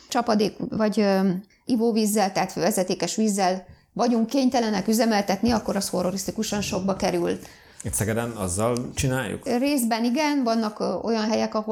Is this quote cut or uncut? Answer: uncut